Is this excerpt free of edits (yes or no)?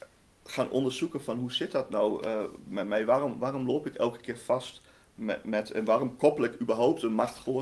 yes